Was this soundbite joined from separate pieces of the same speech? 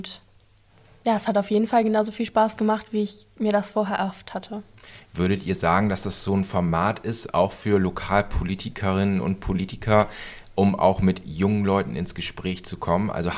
no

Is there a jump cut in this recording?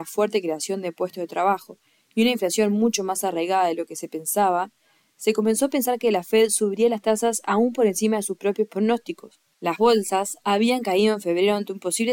no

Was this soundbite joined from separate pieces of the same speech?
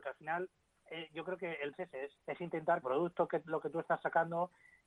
yes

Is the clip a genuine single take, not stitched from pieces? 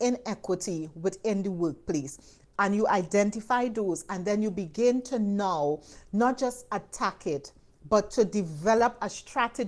yes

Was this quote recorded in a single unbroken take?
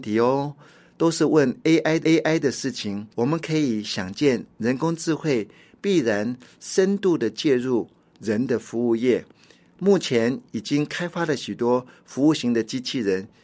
no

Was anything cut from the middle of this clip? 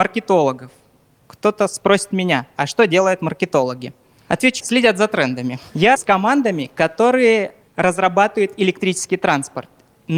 yes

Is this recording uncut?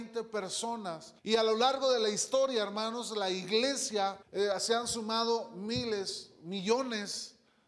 no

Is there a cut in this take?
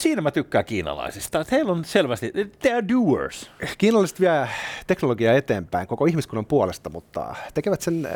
no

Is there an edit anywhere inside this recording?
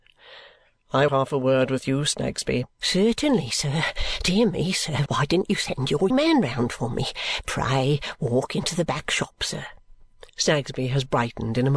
yes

